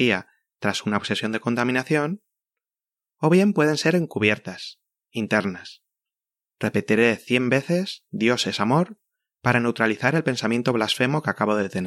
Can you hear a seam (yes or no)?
no